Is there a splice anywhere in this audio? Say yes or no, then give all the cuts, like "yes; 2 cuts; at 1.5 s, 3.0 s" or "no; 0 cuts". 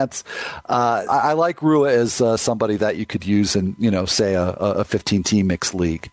yes; 1 cut; at 1.1 s